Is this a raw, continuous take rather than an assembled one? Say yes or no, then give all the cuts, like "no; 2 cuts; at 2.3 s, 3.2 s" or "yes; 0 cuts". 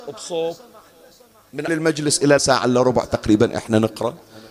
no; 2 cuts; at 1.7 s, 2.4 s